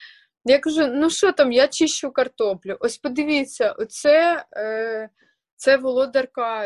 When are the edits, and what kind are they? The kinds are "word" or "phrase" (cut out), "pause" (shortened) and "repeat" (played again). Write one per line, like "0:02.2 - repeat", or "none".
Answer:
none

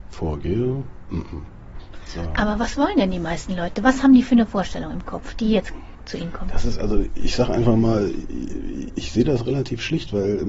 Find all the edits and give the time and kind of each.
0:08.9 - word

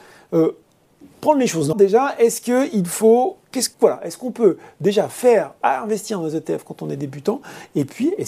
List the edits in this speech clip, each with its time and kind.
0:01.7 - word
0:03.7 - pause
0:05.6 - word

